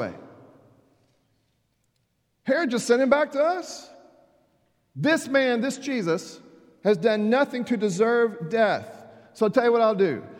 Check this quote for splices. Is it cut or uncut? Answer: uncut